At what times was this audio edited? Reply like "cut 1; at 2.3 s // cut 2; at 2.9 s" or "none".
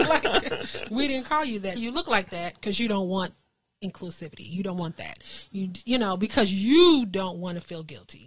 cut 1; at 1.8 s